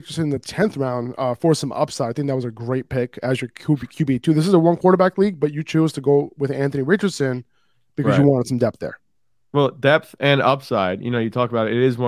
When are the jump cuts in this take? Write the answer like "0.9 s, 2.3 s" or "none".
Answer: none